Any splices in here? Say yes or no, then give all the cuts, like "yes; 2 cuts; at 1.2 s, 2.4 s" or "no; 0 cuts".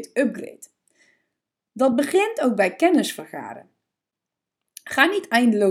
no; 0 cuts